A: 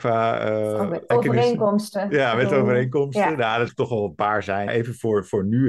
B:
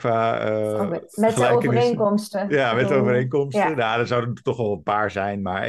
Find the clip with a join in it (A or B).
A